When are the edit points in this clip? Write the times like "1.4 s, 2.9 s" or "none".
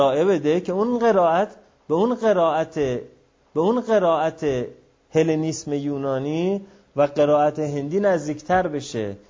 3.4 s

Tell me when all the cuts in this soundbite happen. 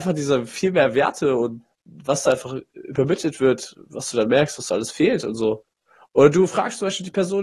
none

